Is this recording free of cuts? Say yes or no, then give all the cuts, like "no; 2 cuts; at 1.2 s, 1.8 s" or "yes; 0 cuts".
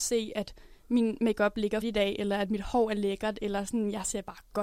no; 1 cut; at 1.8 s